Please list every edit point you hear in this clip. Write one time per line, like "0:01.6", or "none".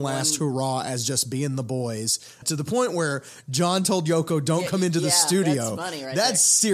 0:02.4